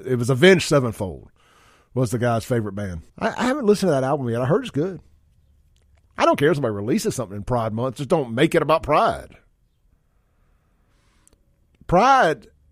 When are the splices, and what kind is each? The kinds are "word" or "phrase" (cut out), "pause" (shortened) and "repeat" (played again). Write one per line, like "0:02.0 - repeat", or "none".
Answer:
0:03.1 - pause